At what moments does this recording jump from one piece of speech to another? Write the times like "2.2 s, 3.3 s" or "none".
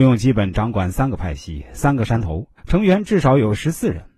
2.6 s